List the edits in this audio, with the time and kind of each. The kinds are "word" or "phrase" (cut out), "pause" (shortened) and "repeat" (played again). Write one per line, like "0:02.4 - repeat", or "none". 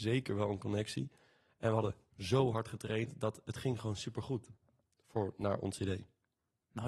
none